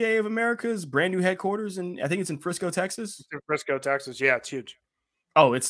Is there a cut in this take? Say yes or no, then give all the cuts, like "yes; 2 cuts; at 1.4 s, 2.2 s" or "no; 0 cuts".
no; 0 cuts